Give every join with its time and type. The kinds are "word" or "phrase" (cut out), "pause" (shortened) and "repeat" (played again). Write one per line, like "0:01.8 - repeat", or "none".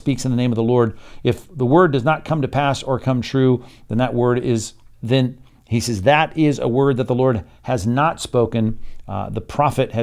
0:04.9 - word